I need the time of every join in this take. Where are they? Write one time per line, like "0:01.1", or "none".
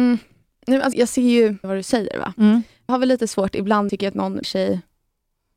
0:00.9
0:01.6
0:02.9
0:03.9
0:04.4